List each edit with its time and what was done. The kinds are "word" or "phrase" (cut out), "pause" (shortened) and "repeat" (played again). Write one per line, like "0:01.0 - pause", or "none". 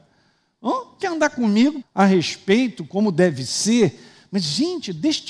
0:01.0 - word
0:01.8 - word

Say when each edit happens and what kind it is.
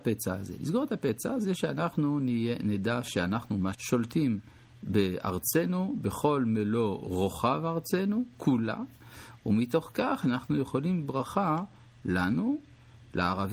0:03.7 - word
0:11.0 - word

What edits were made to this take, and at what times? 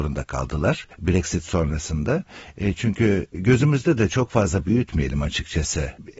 0:00.9 - pause

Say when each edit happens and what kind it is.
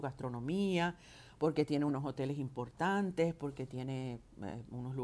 none

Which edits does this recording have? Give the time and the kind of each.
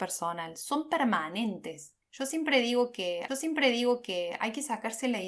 0:02.0 - pause
0:03.3 - repeat

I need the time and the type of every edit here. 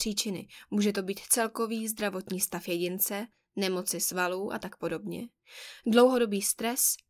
none

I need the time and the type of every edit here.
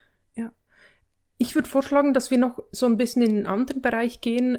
none

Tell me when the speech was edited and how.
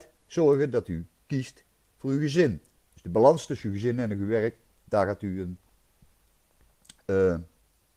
none

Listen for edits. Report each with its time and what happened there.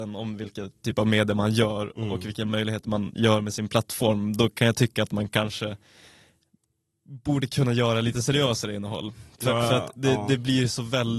none

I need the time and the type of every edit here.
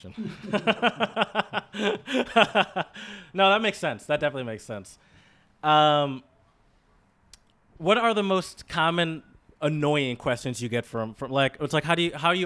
none

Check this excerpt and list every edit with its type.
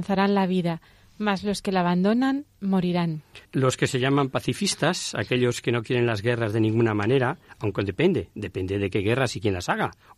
0:03.4 - pause

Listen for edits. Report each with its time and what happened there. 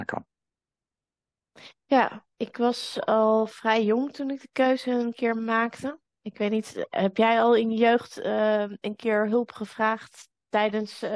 0:02.3 - pause

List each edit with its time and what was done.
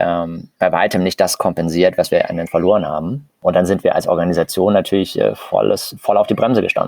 0:02.5 - phrase

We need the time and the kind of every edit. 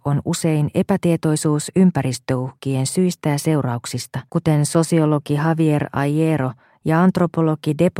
0:04.3 - pause

